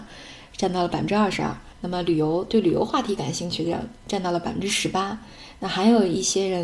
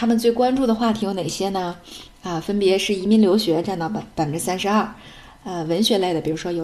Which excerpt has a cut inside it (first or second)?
first